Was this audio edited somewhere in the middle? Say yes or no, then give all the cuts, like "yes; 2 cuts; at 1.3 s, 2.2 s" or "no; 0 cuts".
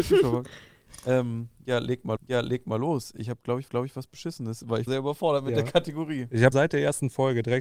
yes; 4 cuts; at 2.2 s, 3.7 s, 4.9 s, 6.5 s